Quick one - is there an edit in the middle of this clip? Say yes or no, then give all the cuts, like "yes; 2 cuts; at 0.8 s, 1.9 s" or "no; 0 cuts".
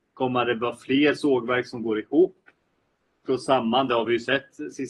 no; 0 cuts